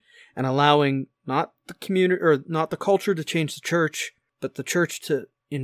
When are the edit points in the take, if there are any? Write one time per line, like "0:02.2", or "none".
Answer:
none